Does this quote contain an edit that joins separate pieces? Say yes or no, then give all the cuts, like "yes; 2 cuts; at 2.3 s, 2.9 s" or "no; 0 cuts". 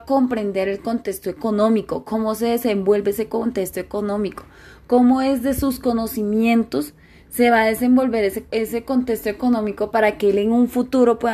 yes; 1 cut; at 8.5 s